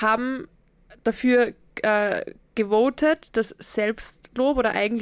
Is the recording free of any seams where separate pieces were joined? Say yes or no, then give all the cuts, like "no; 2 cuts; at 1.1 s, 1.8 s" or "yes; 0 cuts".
yes; 0 cuts